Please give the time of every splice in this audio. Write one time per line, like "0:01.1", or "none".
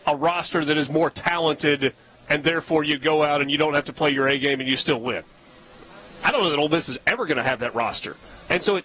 none